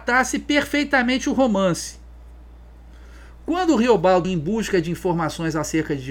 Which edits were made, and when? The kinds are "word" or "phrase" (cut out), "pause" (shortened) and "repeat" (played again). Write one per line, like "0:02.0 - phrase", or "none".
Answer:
0:04.2 - word

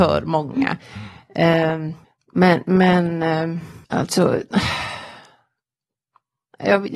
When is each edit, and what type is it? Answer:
0:02.0 - pause
0:03.8 - pause

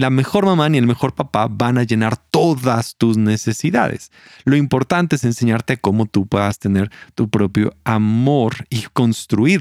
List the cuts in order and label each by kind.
none

